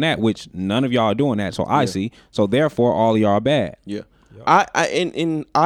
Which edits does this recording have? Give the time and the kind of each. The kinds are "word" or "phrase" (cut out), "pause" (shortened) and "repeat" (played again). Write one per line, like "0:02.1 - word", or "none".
none